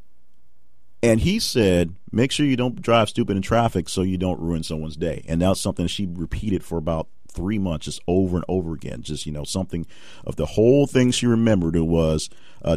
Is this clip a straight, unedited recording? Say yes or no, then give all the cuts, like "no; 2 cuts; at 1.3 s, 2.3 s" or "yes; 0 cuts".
yes; 0 cuts